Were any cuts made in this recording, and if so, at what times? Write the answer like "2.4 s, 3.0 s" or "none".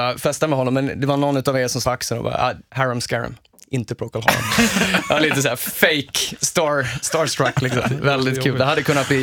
1.8 s, 2.7 s